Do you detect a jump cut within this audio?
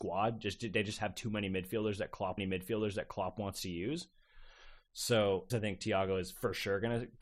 yes; 2 cuts; at 2.4 s, 5.5 s

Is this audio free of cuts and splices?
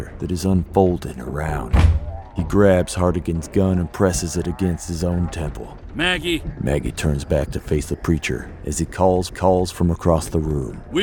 no; 1 cut; at 9.3 s

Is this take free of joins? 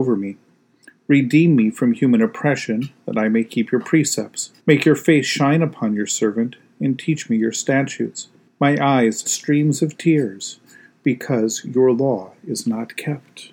no; 3 cuts; at 4.6 s, 8.5 s, 9.3 s

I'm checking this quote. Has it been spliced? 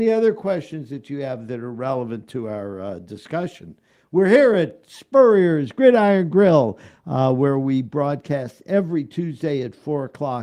no; 0 cuts

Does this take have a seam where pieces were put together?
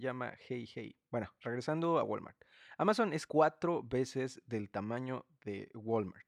yes; 2 cuts; at 1.1 s, 3.3 s

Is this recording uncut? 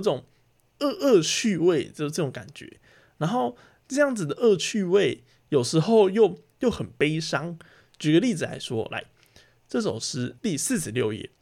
no; 1 cut; at 10.4 s

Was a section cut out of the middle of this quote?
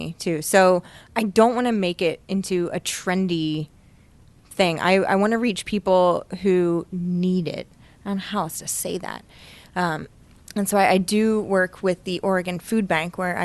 no; 0 cuts

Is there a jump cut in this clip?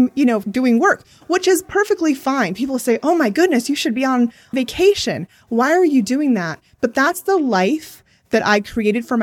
no; 0 cuts

